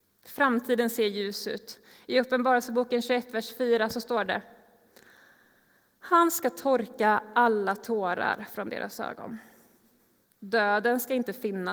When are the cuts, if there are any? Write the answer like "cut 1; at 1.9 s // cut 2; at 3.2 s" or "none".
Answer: none